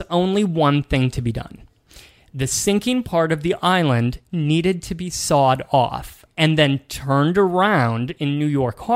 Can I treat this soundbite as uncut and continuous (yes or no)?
no